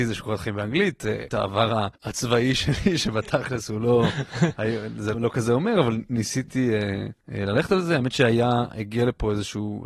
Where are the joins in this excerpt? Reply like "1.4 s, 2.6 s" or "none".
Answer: 1.3 s, 2.0 s, 5.1 s, 7.2 s